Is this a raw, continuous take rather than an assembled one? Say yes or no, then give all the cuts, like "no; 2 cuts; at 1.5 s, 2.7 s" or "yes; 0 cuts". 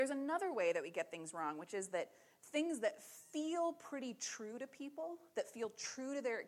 yes; 0 cuts